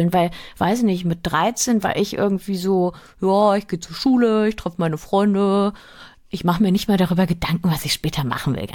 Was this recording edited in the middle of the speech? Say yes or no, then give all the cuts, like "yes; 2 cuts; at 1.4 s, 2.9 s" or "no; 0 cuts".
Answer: no; 0 cuts